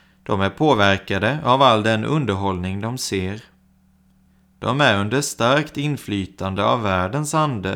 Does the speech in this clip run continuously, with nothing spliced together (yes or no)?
yes